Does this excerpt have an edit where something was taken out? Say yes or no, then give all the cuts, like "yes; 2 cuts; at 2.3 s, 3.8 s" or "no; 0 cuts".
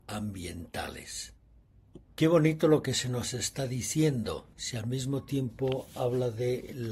yes; 2 cuts; at 2.0 s, 4.5 s